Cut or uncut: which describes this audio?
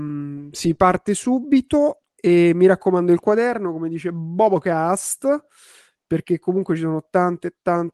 uncut